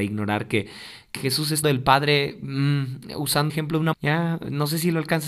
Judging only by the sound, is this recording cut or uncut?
cut